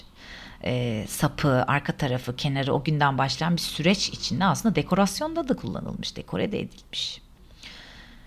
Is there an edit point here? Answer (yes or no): no